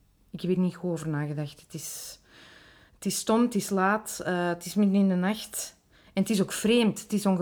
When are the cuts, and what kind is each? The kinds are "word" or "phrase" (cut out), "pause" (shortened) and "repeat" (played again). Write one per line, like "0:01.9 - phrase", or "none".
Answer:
none